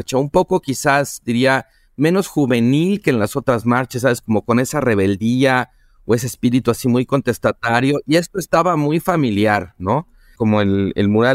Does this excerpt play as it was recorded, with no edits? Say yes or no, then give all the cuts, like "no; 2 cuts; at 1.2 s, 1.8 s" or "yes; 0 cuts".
yes; 0 cuts